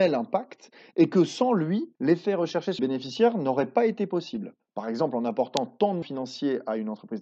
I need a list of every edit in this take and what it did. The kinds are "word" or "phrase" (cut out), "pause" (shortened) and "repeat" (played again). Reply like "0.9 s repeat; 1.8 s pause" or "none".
1.9 s pause; 2.8 s word; 4.6 s pause; 6.0 s word